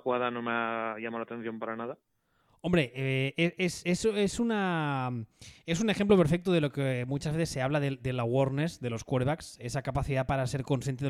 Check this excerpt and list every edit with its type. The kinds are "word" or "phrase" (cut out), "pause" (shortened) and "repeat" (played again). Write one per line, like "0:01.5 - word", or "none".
none